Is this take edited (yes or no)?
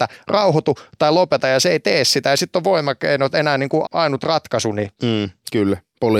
yes